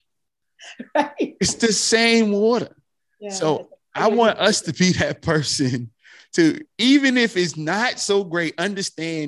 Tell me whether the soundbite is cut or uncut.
uncut